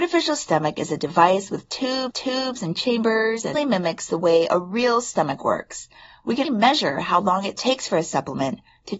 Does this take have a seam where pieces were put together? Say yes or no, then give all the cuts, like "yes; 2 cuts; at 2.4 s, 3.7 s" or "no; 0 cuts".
yes; 3 cuts; at 2.1 s, 3.5 s, 6.4 s